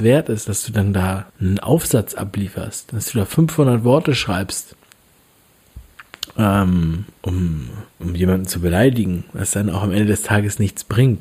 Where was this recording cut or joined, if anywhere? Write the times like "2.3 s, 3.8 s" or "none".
1.3 s, 7.9 s